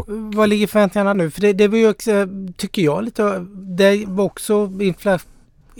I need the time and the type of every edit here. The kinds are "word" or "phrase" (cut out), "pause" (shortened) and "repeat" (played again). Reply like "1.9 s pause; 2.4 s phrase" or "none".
1.1 s word

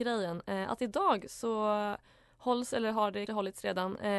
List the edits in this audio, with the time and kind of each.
3.3 s word

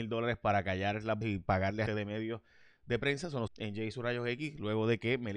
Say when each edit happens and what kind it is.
1.2 s word; 1.9 s word; 3.5 s word

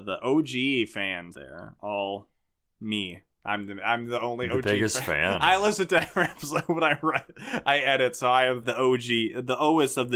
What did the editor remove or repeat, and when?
1.3 s word; 8.6 s word

